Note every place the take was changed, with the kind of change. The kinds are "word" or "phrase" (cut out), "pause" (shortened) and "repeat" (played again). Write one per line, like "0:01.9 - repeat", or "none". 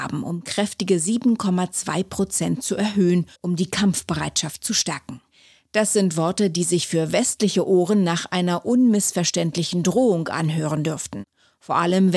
0:03.3 - pause